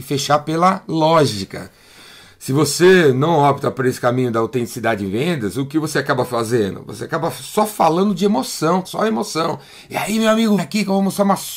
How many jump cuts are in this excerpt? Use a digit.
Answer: 2